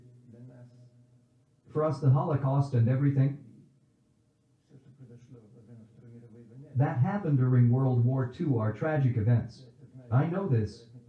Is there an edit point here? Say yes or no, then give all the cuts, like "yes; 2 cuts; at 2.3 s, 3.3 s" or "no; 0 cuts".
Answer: no; 0 cuts